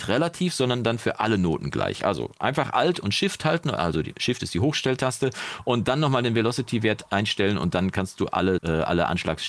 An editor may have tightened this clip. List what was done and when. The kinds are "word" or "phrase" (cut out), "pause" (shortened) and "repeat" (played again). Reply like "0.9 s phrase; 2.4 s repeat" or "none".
8.6 s word